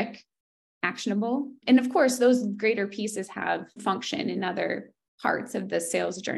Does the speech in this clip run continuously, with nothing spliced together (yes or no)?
no